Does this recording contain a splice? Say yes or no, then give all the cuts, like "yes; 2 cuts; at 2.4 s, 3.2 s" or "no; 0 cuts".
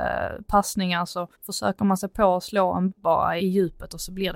yes; 3 cuts; at 1.3 s, 2.9 s, 3.4 s